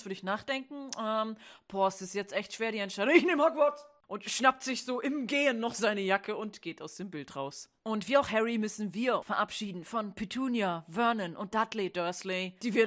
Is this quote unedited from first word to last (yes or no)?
no